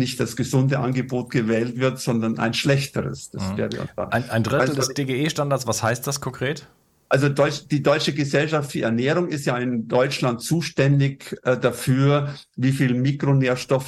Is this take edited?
no; 0 cuts

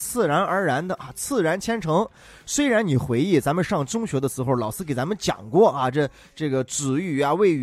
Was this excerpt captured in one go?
yes; 0 cuts

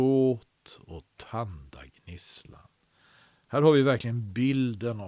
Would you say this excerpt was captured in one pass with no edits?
yes; 0 cuts

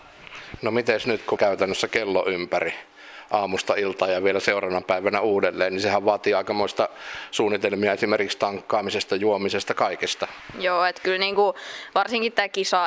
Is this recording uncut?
no; 1 cut; at 1.4 s

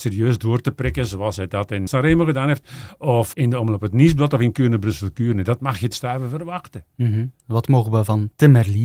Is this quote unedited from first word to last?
no; 4 cuts; at 1.9 s, 3.3 s, 5.9 s, 7.4 s

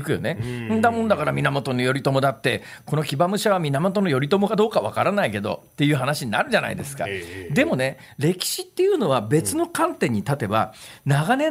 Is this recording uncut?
yes; 0 cuts

